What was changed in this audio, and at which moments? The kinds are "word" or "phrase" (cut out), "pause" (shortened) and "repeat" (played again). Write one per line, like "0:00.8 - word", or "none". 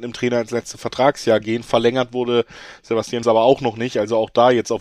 0:03.2 - word